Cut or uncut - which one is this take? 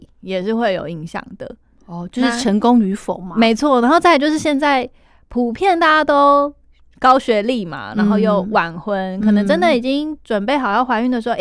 uncut